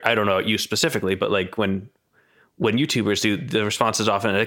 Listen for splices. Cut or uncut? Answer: uncut